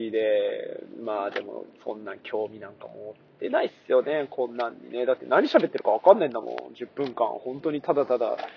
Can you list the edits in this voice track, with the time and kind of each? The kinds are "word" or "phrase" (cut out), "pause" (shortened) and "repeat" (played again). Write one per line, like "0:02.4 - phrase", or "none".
none